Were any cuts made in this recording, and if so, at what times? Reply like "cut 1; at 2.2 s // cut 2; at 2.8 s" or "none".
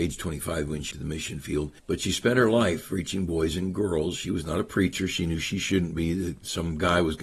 cut 1; at 0.9 s // cut 2; at 1.8 s

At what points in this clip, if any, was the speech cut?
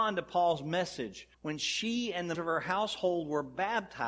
cut 1; at 1.3 s // cut 2; at 2.3 s

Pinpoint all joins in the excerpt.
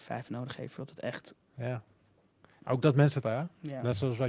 cut 1; at 1.4 s // cut 2; at 3.2 s

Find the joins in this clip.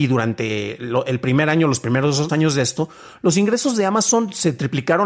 cut 1; at 2.3 s

